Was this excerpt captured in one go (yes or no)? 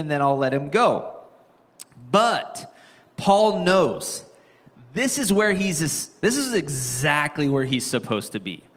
yes